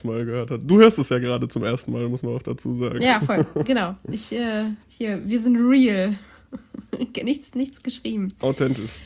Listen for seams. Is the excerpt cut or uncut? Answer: cut